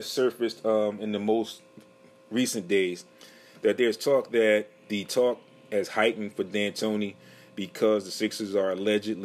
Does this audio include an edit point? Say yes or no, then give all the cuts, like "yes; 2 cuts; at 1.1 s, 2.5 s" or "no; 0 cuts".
no; 0 cuts